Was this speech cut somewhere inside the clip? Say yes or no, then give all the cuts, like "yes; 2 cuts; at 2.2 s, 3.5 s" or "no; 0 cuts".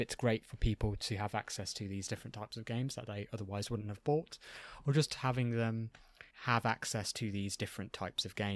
yes; 1 cut; at 6.3 s